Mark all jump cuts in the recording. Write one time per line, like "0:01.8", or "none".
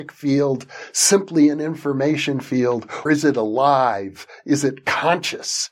0:03.1